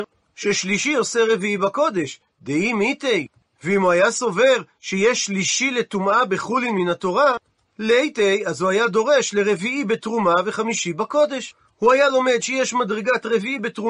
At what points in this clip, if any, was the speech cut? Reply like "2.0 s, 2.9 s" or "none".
none